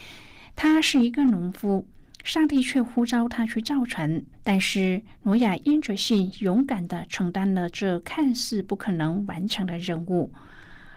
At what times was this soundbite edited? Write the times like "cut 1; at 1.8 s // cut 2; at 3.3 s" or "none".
cut 1; at 4.3 s